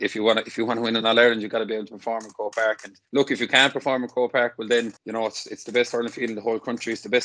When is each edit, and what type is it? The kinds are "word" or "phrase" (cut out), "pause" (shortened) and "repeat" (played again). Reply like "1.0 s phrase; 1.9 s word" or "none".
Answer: 3.0 s pause; 5.0 s pause